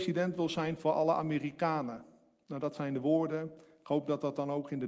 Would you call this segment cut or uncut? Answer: uncut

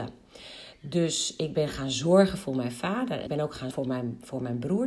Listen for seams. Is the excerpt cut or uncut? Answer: cut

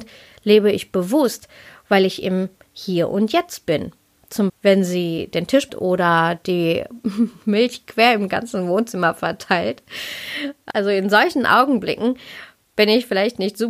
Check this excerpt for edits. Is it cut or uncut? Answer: cut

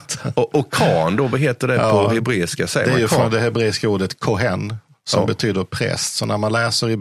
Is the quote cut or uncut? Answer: uncut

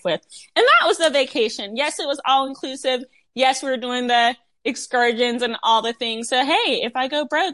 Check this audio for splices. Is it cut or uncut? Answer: uncut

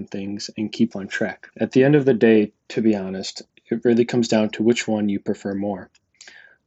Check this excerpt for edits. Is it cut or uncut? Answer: cut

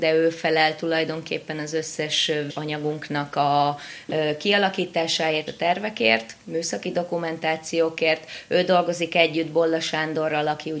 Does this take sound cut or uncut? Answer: cut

